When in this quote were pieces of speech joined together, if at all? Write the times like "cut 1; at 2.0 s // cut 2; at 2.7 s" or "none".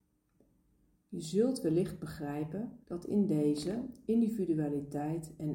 cut 1; at 2.8 s

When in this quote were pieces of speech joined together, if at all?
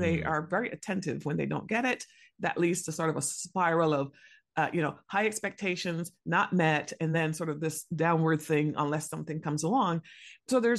none

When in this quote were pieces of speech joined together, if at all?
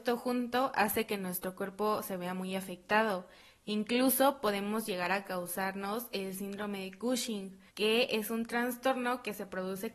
cut 1; at 7.7 s

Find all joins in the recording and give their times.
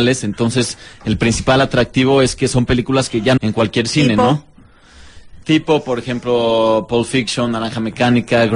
cut 1; at 3.4 s

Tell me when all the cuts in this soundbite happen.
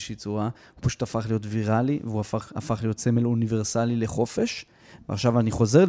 none

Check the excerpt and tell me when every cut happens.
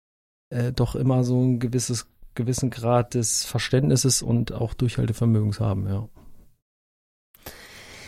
none

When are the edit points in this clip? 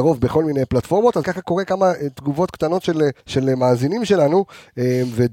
cut 1; at 1.2 s // cut 2; at 3.2 s

